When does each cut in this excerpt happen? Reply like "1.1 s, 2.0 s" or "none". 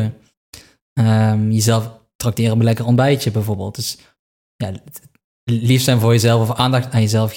none